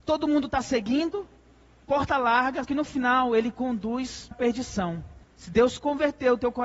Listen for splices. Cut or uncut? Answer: cut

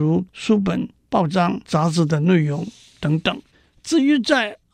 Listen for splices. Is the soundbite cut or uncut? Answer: cut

